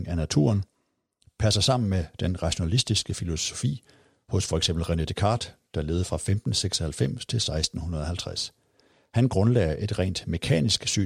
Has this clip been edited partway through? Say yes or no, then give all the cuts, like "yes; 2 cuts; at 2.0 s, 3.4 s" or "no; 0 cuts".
no; 0 cuts